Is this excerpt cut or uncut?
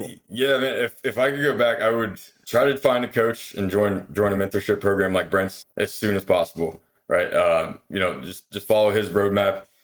uncut